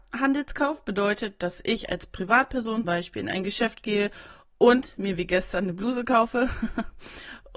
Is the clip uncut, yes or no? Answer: no